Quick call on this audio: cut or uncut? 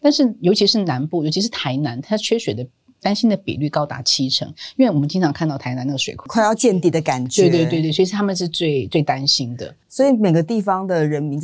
uncut